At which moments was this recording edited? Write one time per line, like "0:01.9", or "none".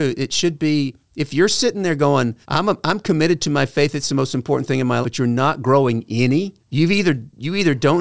0:02.4
0:05.0
0:06.6